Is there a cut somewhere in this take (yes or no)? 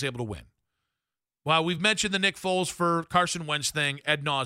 no